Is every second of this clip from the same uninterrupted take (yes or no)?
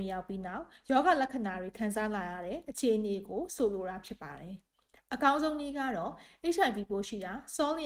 no